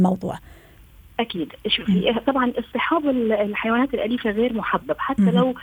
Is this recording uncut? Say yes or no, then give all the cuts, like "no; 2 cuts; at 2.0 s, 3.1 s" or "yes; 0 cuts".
yes; 0 cuts